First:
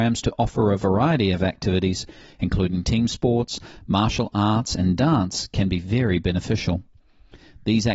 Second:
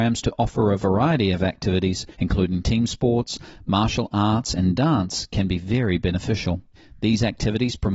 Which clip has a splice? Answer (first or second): second